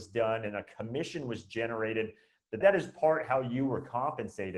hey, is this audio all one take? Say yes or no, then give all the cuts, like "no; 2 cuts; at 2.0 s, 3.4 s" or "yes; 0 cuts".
no; 1 cut; at 2.6 s